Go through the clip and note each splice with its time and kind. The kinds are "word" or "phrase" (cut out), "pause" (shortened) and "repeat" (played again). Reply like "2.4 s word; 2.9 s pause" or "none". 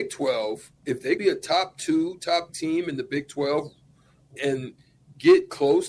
1.2 s word; 2.5 s word; 4.4 s word